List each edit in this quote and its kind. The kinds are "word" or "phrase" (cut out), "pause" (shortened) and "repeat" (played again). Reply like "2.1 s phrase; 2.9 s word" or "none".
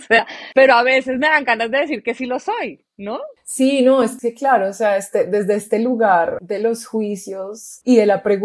none